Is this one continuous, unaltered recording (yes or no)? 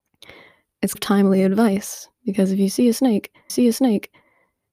no